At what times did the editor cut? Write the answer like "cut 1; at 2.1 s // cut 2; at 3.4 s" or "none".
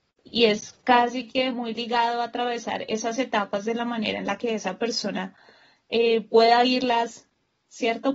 none

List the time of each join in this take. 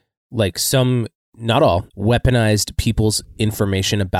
cut 1; at 1.1 s // cut 2; at 1.9 s

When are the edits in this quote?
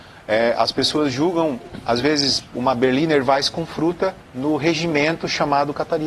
cut 1; at 4.2 s

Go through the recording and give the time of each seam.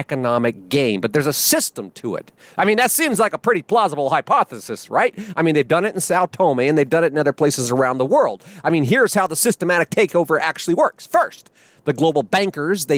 none

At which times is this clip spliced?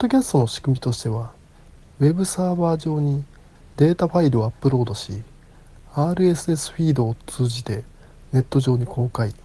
none

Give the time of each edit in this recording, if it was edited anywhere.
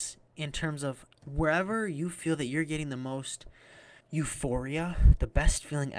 cut 1; at 1.1 s // cut 2; at 4.0 s

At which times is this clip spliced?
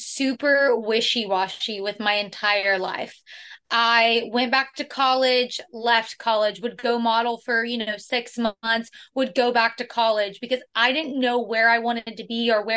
none

